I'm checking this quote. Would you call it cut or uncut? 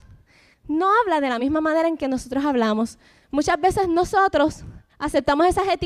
uncut